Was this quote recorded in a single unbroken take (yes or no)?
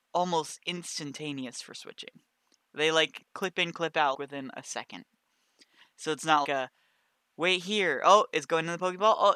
no